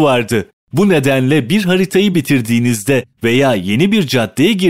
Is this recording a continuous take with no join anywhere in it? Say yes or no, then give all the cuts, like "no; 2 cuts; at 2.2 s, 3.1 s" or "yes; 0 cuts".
yes; 0 cuts